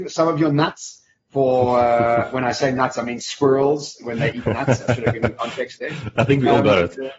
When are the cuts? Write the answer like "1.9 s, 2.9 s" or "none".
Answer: none